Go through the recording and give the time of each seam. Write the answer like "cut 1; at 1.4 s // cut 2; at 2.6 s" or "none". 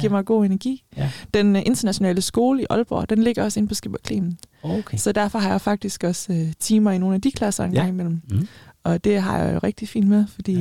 none